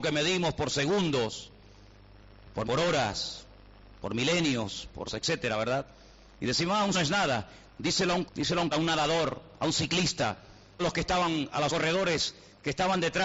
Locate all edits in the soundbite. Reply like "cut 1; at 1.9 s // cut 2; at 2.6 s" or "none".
cut 1; at 2.6 s // cut 2; at 5.1 s // cut 3; at 6.9 s // cut 4; at 8.3 s // cut 5; at 8.7 s // cut 6; at 10.8 s // cut 7; at 11.7 s